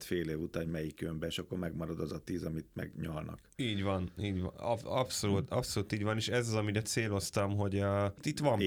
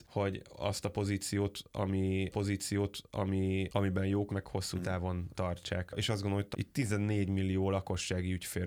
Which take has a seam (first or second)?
second